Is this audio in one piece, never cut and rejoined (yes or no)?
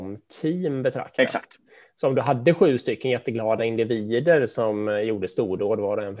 yes